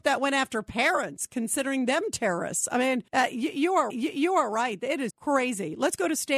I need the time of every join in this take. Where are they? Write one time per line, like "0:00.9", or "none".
0:03.1
0:03.9
0:05.1